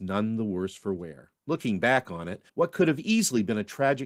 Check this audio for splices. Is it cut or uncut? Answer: cut